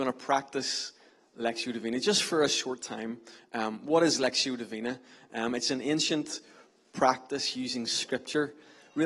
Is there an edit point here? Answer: no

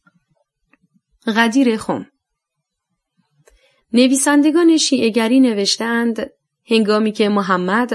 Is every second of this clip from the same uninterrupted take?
yes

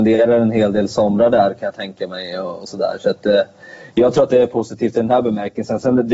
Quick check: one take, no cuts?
yes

